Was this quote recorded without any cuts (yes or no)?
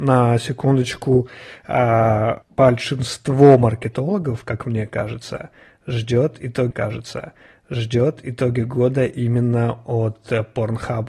no